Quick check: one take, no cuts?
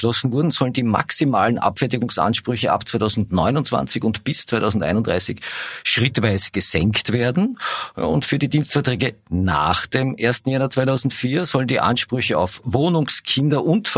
yes; 0 cuts

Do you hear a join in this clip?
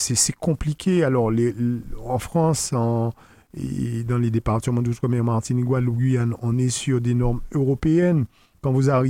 no; 0 cuts

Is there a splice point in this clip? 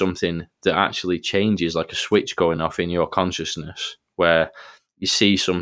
no; 0 cuts

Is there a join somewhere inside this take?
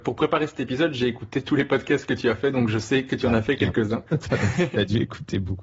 yes; 1 cut; at 4.1 s

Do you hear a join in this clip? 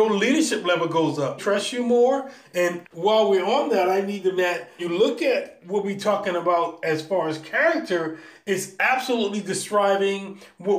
yes; 4 cuts; at 1.4 s, 2.8 s, 4.4 s, 4.8 s

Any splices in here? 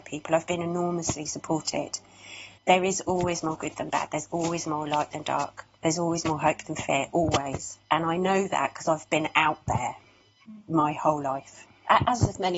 yes; 3 cuts; at 2.5 s, 7.8 s, 10.6 s

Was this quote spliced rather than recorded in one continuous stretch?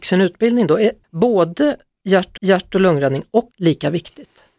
yes; 3 cuts; at 1.0 s, 2.4 s, 3.5 s

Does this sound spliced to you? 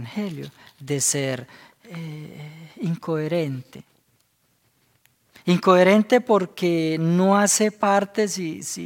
no; 0 cuts

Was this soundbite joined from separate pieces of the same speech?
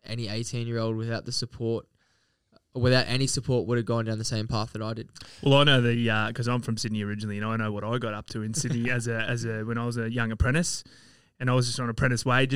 no; 0 cuts

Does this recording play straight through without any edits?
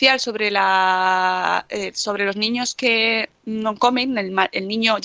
yes; 0 cuts

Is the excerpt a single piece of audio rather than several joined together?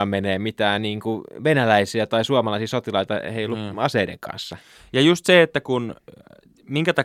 yes; 0 cuts

